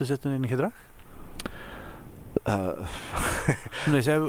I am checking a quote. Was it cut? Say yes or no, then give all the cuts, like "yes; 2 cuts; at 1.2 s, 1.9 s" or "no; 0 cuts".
no; 0 cuts